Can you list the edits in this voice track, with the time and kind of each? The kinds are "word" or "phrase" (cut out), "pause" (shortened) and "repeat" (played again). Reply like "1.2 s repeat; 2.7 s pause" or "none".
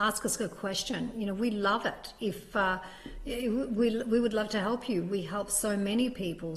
none